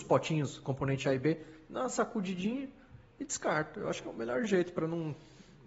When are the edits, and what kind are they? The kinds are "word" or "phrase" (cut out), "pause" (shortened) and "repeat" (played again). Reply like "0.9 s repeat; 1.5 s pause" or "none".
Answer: none

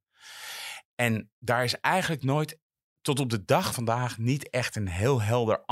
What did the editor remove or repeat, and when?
3.7 s word

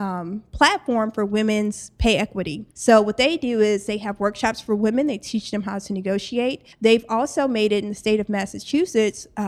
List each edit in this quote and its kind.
2.7 s pause; 6.7 s pause

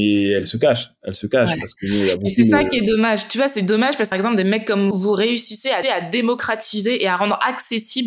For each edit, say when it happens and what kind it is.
4.1 s phrase; 4.9 s word; 5.8 s repeat

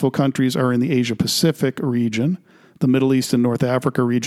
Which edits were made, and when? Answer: none

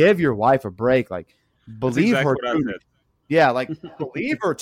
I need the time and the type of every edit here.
none

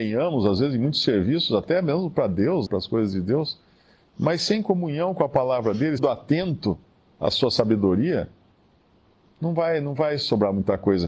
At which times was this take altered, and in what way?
2.7 s word; 6.0 s phrase

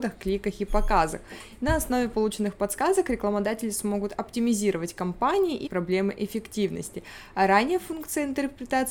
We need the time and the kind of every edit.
5.7 s word

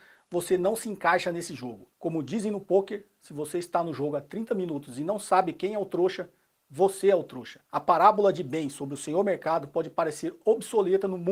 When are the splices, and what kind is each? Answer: 1.9 s pause; 7.6 s pause

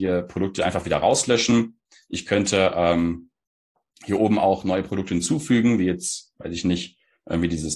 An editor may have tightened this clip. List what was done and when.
none

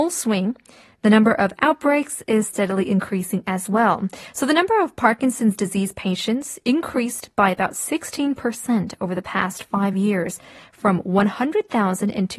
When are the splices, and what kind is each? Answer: none

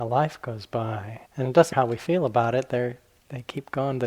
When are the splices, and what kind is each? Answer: 1.3 s pause; 1.7 s word

